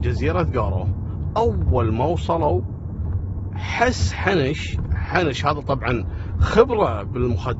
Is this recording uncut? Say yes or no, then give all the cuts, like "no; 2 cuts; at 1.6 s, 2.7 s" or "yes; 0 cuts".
yes; 0 cuts